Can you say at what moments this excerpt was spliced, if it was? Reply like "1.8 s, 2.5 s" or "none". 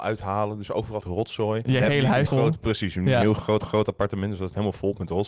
1.0 s, 1.6 s, 2.3 s, 3.6 s

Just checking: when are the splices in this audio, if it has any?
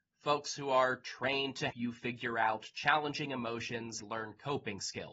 1.7 s, 4.0 s

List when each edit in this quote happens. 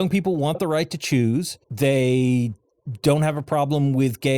1.6 s

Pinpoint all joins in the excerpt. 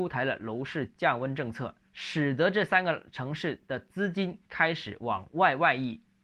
1.9 s, 4.5 s

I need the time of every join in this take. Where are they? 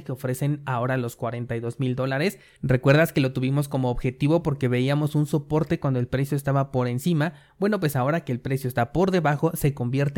none

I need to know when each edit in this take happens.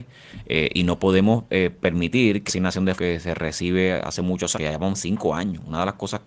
2.5 s, 3.0 s, 4.5 s

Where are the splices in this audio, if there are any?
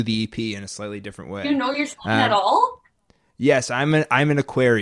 none

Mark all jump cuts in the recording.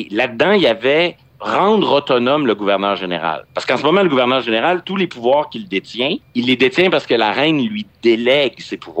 1.3 s, 6.3 s

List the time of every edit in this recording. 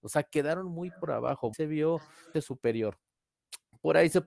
1.5 s, 2.3 s

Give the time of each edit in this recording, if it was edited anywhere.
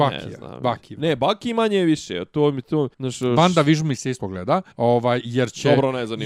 2.9 s, 4.2 s, 4.7 s

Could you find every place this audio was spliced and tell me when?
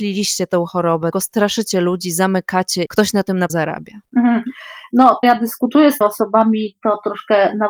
1.1 s, 2.9 s, 3.5 s, 5.2 s, 6.0 s

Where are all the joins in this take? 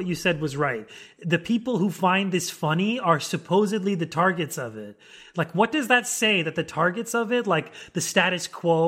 none

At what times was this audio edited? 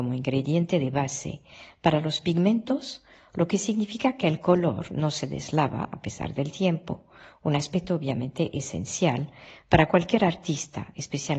none

